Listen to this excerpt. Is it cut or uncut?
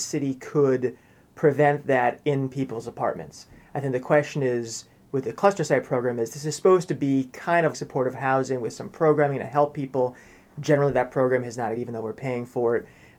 cut